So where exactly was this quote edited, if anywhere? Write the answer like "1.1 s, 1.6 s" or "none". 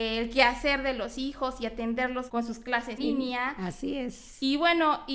2.3 s, 3.0 s